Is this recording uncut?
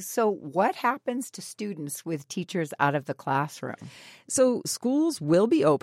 yes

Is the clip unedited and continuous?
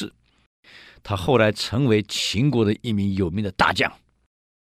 yes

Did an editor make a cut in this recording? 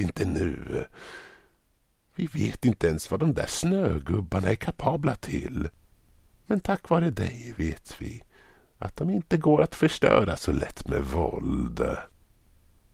no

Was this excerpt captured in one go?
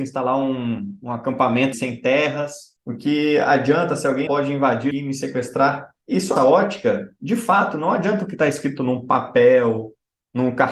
no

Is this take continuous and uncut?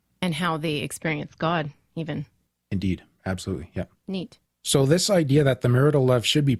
yes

